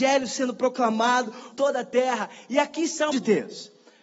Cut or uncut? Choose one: cut